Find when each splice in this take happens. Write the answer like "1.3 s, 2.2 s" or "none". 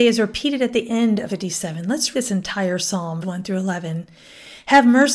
1.3 s, 2.1 s, 3.2 s